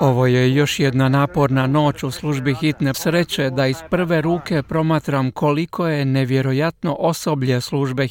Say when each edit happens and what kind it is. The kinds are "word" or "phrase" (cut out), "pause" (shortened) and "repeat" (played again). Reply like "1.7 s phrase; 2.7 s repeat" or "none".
2.9 s phrase